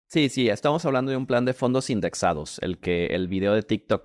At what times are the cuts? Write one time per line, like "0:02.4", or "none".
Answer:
none